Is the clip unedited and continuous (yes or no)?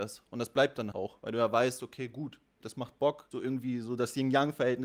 no